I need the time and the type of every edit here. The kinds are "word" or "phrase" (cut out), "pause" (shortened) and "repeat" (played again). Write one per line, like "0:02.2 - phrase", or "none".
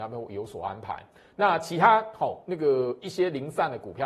none